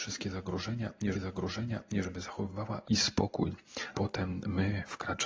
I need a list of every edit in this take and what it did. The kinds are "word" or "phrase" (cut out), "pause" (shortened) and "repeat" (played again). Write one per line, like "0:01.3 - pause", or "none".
0:01.1 - repeat
0:02.8 - word
0:03.9 - word